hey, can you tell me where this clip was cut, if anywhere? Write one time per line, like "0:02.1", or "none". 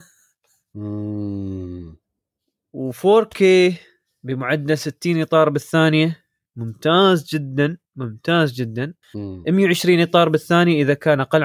0:09.0